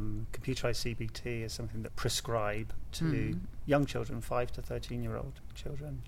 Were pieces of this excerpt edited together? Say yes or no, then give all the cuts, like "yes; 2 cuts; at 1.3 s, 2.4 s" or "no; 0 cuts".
yes; 1 cut; at 1.9 s